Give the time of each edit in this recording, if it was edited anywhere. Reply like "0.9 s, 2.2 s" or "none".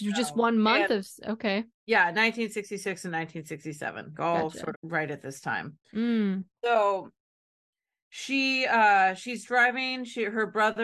1.7 s, 4.1 s, 4.7 s, 5.8 s